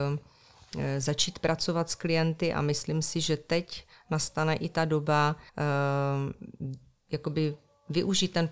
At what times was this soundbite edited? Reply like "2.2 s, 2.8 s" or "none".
5.5 s